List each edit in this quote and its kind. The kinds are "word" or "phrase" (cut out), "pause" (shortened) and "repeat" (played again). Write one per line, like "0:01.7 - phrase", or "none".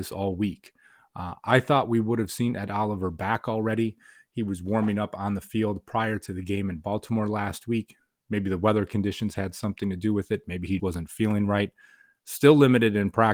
0:10.8 - word